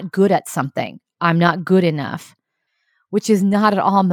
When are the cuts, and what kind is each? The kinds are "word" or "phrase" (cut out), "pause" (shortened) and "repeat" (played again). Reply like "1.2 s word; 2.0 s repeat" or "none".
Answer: none